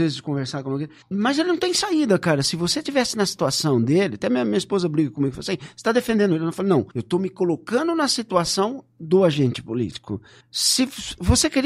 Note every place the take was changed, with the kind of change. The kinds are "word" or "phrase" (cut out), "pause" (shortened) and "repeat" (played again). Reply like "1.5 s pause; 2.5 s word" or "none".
1.0 s pause; 6.9 s pause; 10.4 s pause